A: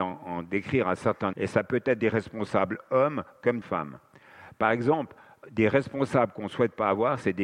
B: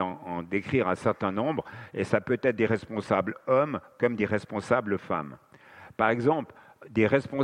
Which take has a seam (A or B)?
A